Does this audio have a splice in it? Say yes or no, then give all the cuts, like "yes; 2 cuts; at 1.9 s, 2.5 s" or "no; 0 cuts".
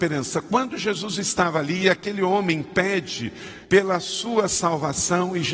yes; 1 cut; at 3.6 s